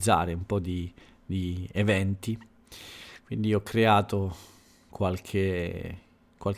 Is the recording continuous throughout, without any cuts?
yes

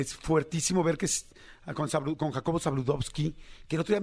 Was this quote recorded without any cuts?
yes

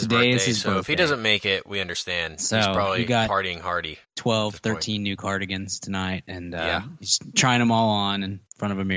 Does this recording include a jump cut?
yes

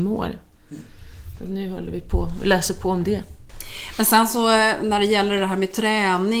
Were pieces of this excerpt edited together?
no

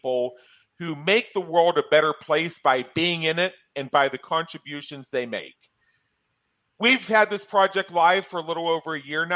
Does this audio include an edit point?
no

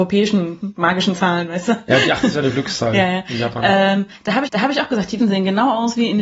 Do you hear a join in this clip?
yes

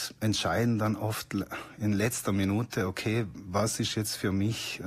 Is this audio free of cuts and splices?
yes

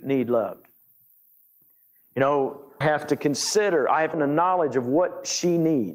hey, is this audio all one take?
no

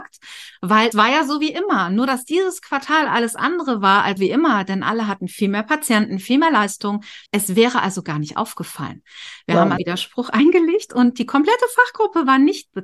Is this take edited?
yes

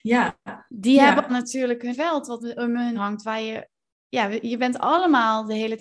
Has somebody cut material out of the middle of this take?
yes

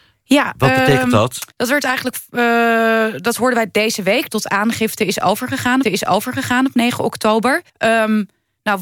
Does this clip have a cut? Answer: yes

